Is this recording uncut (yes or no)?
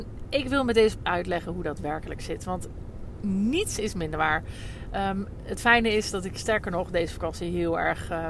no